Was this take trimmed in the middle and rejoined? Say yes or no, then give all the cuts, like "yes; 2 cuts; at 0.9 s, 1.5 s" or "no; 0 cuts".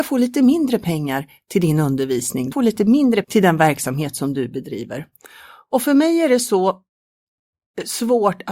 yes; 2 cuts; at 2.5 s, 3.2 s